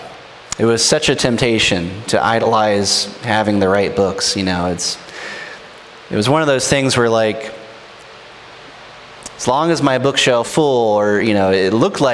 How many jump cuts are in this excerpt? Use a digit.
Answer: 2